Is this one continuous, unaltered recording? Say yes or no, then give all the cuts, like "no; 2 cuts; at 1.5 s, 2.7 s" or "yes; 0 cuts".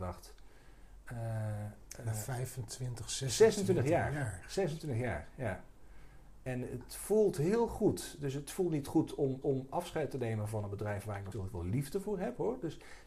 no; 2 cuts; at 9.4 s, 11.3 s